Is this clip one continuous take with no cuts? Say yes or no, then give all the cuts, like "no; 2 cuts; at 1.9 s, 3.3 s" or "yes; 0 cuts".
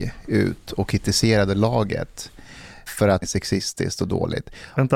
no; 2 cuts; at 2.9 s, 3.2 s